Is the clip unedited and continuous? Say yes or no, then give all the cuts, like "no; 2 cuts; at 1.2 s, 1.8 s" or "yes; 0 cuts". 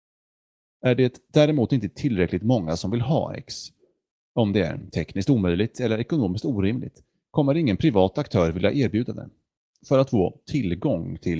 yes; 0 cuts